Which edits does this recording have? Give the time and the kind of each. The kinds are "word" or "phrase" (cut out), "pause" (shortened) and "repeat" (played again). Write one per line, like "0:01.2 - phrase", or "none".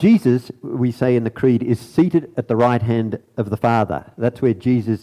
none